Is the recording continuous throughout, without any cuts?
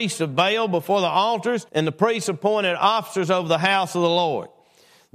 no; 1 cut; at 1.7 s

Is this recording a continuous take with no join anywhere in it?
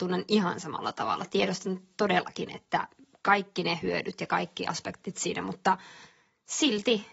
yes; 0 cuts

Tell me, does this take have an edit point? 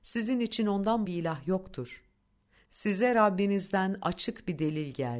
yes; 1 cut; at 1.1 s

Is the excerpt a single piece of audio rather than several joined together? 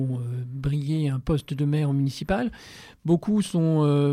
yes; 0 cuts

